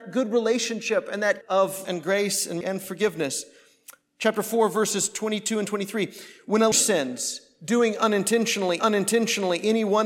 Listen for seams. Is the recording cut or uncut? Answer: cut